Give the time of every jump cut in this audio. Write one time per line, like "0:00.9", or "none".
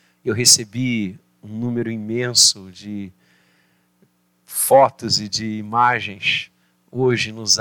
none